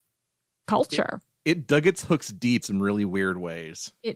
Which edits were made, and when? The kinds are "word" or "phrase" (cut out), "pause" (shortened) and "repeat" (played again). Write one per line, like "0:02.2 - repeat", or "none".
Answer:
0:02.6 - word